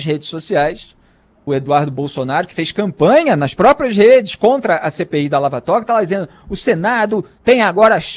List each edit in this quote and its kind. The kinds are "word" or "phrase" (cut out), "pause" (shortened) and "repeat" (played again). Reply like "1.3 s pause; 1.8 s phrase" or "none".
1.5 s word